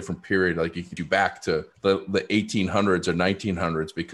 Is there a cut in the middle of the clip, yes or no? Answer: yes